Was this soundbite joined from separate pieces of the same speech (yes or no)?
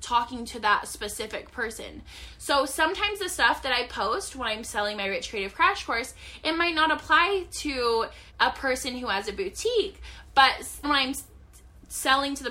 yes